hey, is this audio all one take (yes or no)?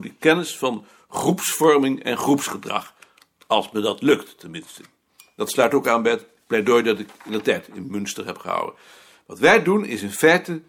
yes